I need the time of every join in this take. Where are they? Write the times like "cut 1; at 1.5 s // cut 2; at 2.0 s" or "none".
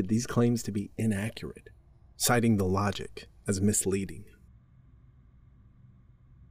none